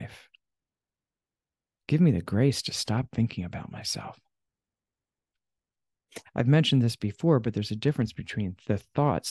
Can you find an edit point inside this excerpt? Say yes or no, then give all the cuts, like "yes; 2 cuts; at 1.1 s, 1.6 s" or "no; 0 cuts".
no; 0 cuts